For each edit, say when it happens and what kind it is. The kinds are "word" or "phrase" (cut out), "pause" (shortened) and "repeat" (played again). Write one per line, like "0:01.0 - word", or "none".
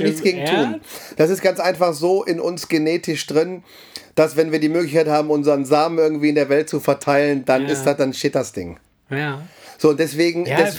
none